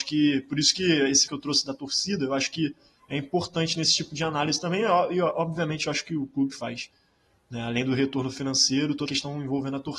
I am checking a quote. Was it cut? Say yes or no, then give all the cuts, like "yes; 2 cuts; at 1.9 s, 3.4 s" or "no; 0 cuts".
yes; 3 cuts; at 1.3 s, 6.5 s, 9.1 s